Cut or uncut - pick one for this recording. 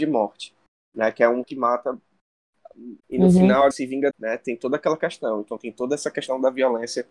cut